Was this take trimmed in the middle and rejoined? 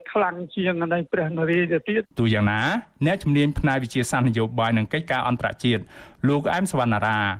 yes; 1 cut; at 2.1 s

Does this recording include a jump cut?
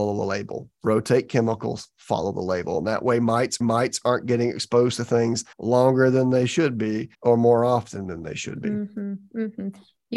yes; 3 cuts; at 3.6 s, 5.5 s, 7.1 s

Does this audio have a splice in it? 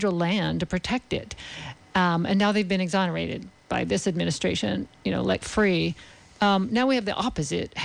no; 0 cuts

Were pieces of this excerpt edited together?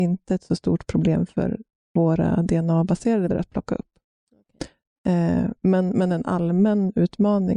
yes; 2 cuts; at 1.8 s, 3.3 s

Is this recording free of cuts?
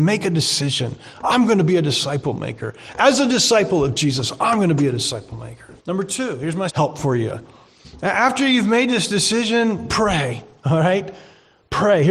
no; 3 cuts; at 5.8 s, 6.7 s, 9.9 s

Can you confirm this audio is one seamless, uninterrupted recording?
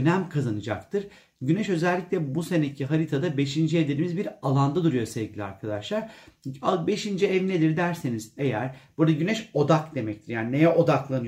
yes; 0 cuts

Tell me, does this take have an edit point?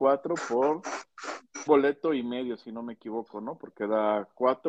yes; 1 cut; at 1.7 s

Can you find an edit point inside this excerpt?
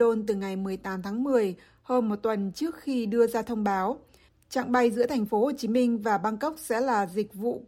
no; 0 cuts

